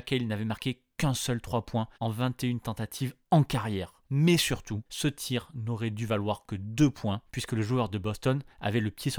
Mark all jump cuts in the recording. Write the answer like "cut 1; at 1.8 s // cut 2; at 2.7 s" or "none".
cut 1; at 1.9 s // cut 2; at 3.2 s // cut 3; at 4.0 s // cut 4; at 4.9 s // cut 5; at 7.3 s